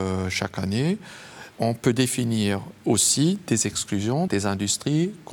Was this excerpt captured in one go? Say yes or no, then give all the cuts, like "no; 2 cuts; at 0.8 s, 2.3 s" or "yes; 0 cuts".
no; 2 cuts; at 1.5 s, 4.3 s